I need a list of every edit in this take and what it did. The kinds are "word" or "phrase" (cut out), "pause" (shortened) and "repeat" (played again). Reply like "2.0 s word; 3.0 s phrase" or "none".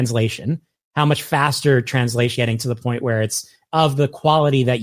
2.3 s word